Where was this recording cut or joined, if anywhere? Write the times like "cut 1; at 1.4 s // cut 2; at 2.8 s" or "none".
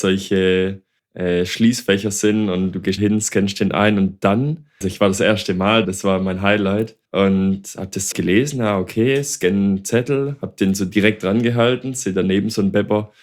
cut 1; at 1.0 s // cut 2; at 3.0 s // cut 3; at 4.8 s // cut 4; at 5.8 s // cut 5; at 7.1 s // cut 6; at 8.1 s